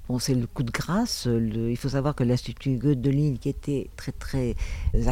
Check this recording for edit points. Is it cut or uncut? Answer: cut